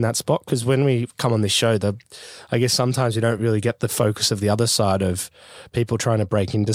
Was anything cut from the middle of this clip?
no; 0 cuts

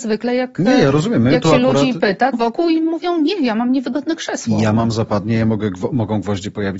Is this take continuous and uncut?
no; 1 cut; at 2.3 s

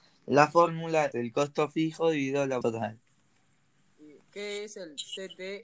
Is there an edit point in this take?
yes; 2 cuts; at 1.1 s, 2.6 s

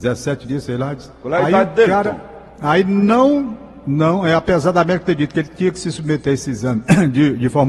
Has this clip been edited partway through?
yes; 1 cut; at 2.5 s

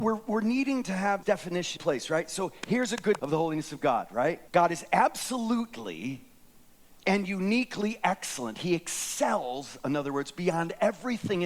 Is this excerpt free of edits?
no; 4 cuts; at 1.2 s, 1.8 s, 3.2 s, 4.5 s

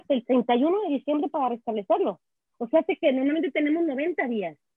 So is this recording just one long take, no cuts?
yes; 0 cuts

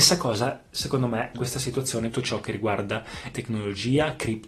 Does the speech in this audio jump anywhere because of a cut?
yes; 3 cuts; at 1.3 s, 2.1 s, 3.3 s

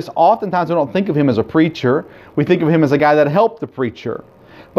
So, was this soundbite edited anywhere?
no; 0 cuts

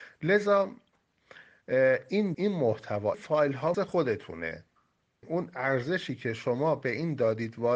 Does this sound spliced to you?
yes; 4 cuts; at 2.3 s, 3.1 s, 3.7 s, 5.2 s

